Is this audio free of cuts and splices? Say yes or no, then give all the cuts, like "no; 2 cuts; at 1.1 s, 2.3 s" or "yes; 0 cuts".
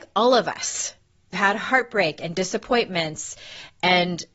no; 1 cut; at 1.3 s